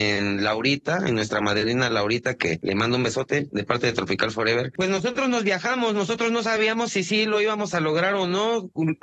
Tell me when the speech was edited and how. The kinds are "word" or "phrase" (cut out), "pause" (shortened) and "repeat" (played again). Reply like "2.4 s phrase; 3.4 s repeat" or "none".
none